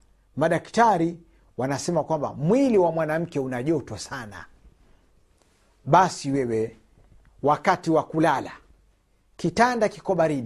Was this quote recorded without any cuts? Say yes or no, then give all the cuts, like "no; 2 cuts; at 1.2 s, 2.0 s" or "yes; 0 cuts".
yes; 0 cuts